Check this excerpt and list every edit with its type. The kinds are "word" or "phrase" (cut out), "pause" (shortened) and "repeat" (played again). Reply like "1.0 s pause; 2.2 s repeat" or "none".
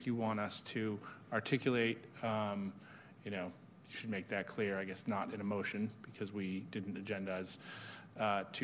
3.6 s pause